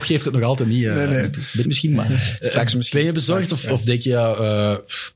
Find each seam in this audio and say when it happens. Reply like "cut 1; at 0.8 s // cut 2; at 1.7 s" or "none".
cut 1; at 1.7 s